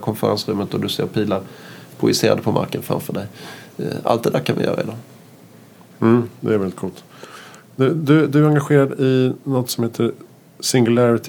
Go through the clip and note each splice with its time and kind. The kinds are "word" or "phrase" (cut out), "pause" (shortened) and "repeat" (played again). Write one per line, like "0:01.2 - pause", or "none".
none